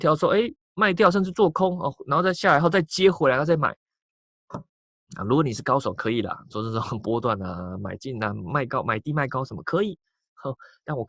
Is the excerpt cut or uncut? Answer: uncut